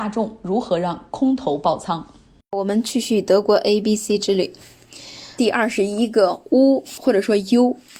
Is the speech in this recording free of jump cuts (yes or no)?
yes